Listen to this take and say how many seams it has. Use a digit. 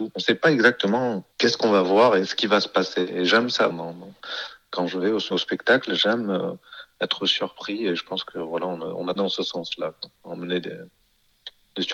4